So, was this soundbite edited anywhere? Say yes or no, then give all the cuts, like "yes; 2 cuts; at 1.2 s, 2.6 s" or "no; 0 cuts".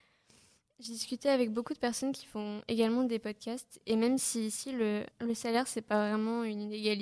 yes; 1 cut; at 5.1 s